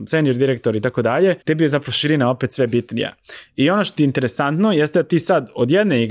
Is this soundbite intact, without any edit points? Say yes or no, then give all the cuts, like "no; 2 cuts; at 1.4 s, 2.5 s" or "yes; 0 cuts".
no; 1 cut; at 1.4 s